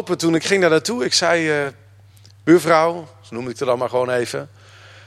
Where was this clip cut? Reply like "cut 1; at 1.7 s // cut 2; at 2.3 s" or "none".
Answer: none